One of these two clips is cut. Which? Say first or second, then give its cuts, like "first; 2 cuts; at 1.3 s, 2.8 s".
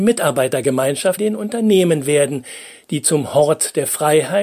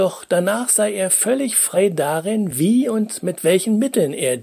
first; 1 cut; at 1.2 s